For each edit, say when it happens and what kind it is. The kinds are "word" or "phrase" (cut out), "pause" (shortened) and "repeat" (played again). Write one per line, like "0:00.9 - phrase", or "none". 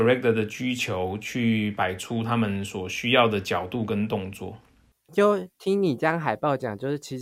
none